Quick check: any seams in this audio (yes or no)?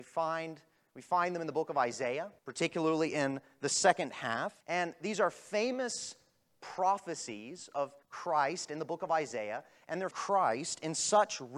yes